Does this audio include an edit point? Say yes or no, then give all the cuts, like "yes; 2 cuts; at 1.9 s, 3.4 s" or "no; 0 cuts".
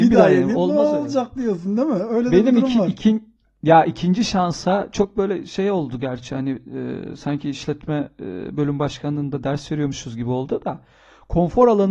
no; 0 cuts